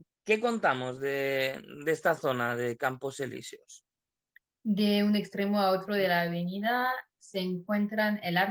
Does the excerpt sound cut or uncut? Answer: uncut